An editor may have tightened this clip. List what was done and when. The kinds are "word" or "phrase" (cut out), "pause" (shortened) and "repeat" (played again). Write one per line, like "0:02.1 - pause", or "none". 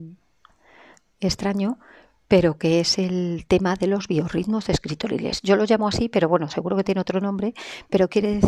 none